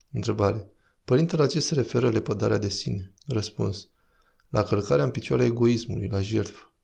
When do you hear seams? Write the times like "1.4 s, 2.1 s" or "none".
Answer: 3.2 s